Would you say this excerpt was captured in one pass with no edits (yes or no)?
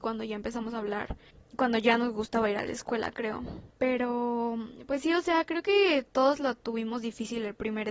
no